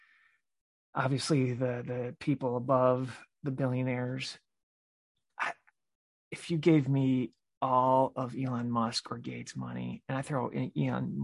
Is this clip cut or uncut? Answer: uncut